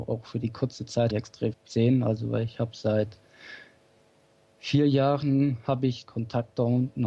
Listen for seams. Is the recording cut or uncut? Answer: cut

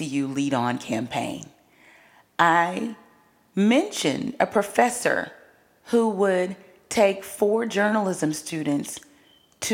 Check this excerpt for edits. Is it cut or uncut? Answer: uncut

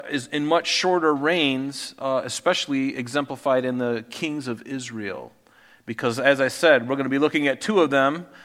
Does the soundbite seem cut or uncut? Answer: uncut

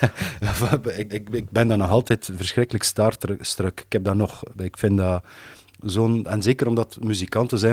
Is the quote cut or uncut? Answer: cut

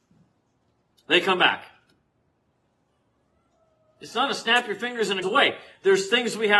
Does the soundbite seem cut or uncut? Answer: cut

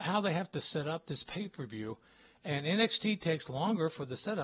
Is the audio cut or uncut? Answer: uncut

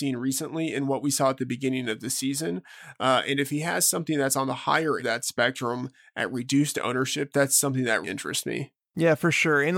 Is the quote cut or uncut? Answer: cut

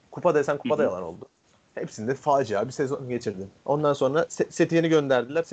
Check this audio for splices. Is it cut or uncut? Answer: cut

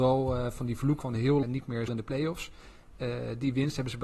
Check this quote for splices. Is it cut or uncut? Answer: cut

